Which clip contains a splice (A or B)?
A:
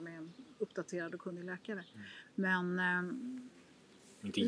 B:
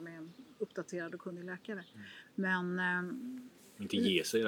B